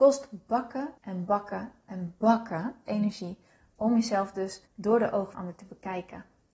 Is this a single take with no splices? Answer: no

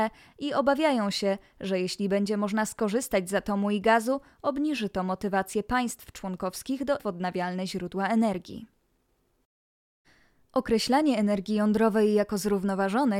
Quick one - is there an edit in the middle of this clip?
yes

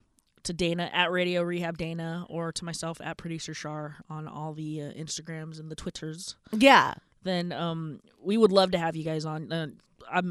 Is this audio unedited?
yes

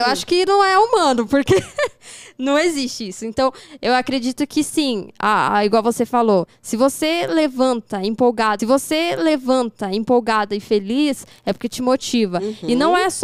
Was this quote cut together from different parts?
yes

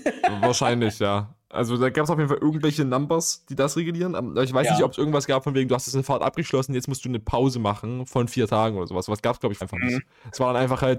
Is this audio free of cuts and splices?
no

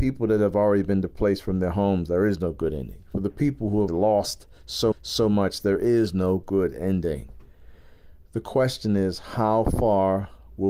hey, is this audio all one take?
no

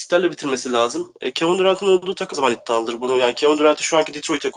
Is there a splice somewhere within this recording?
yes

